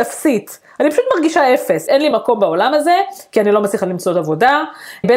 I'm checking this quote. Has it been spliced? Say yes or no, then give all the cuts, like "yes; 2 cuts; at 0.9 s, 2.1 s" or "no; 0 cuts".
no; 0 cuts